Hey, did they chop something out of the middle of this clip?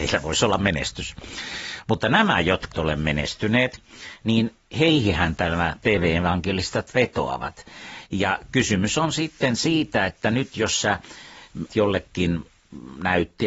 yes; 2 cuts; at 2.7 s, 11.7 s

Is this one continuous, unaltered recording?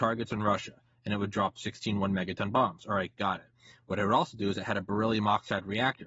yes; 0 cuts

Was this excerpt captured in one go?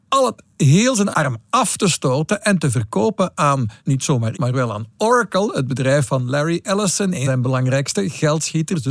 no; 5 cuts; at 1.1 s, 3.8 s, 4.3 s, 4.9 s, 7.2 s

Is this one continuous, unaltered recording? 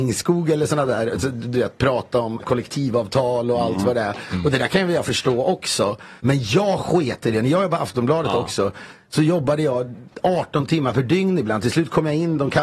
no; 2 cuts; at 2.4 s, 6.2 s

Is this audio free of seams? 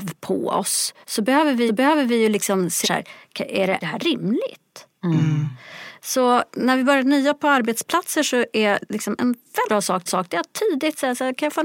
no; 6 cuts; at 1.0 s, 1.7 s, 2.8 s, 3.8 s, 9.6 s, 10.1 s

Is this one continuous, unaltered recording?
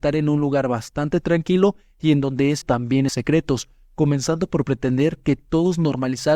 no; 2 cuts; at 2.6 s, 3.1 s

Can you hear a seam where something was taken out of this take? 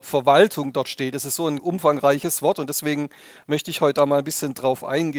yes; 1 cut; at 1.6 s

